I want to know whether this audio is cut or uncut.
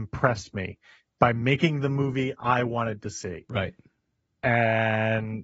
uncut